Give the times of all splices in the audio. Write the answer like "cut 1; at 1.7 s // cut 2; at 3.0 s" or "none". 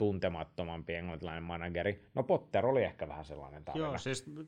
none